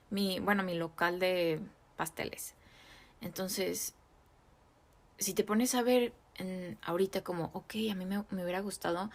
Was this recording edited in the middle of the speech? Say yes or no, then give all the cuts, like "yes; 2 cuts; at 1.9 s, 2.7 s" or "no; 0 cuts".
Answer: no; 0 cuts